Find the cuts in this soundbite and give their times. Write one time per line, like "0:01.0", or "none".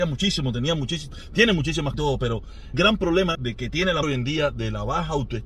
0:01.9
0:02.7
0:03.3
0:04.0